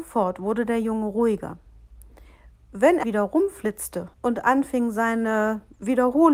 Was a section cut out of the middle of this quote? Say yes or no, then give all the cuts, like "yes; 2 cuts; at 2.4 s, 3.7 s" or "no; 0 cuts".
yes; 2 cuts; at 3.0 s, 4.1 s